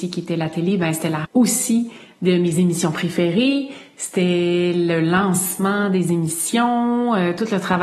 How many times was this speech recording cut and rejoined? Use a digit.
1